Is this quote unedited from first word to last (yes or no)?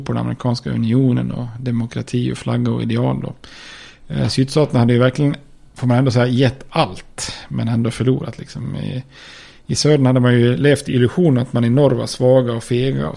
yes